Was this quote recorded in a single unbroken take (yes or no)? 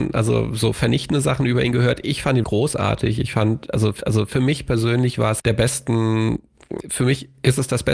no